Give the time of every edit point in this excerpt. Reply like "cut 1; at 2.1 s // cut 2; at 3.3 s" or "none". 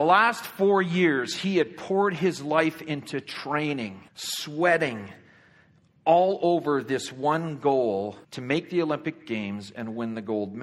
cut 1; at 4.1 s // cut 2; at 8.2 s